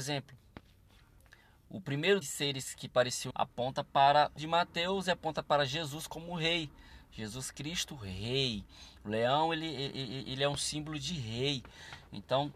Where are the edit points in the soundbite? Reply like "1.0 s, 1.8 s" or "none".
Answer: 2.2 s, 3.3 s, 4.4 s